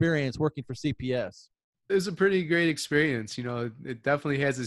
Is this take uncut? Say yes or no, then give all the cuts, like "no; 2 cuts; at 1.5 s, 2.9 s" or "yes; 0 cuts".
no; 1 cut; at 1.9 s